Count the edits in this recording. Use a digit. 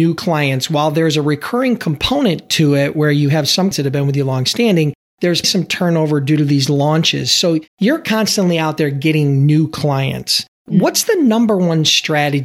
3